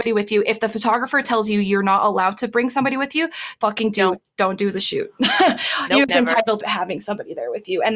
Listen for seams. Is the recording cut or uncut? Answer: cut